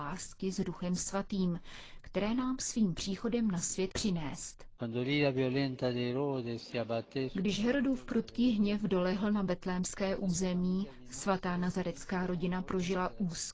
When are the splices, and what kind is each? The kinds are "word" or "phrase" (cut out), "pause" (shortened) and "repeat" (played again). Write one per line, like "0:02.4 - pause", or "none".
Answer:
0:03.9 - word